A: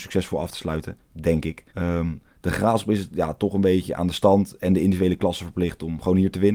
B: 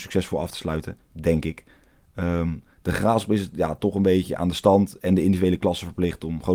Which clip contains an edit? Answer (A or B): A